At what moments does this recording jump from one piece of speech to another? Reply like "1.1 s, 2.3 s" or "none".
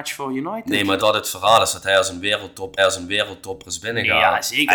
1.0 s, 2.8 s